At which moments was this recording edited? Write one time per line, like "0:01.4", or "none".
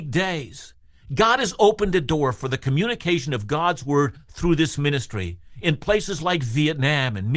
none